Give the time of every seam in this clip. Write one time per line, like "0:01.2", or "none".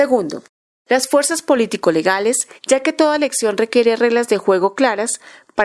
0:02.6

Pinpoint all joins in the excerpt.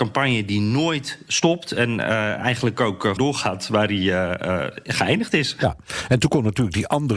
0:03.2

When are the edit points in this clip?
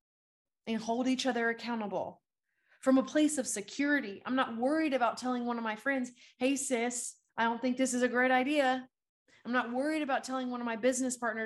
none

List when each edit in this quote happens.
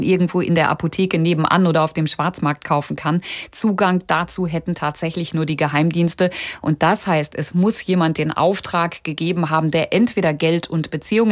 none

